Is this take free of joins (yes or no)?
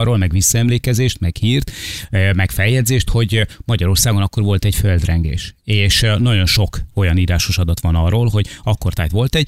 yes